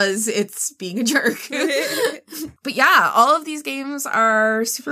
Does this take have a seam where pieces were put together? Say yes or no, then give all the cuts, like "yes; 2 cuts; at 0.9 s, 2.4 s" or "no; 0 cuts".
no; 0 cuts